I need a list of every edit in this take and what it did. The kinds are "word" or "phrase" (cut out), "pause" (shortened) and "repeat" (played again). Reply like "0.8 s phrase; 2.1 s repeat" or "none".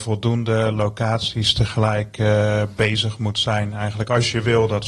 none